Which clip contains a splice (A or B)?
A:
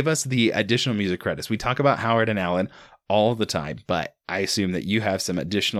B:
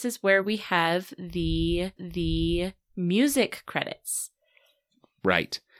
B